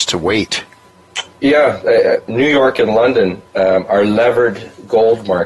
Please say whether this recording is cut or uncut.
uncut